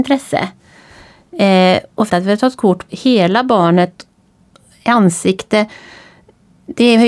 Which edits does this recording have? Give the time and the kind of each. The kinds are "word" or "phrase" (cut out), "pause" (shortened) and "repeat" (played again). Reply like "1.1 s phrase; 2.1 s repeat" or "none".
2.1 s word; 2.9 s word